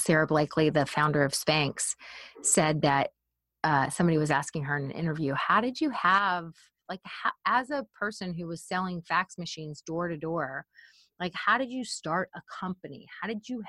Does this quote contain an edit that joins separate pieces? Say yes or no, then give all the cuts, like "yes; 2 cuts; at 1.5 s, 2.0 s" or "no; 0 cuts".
no; 0 cuts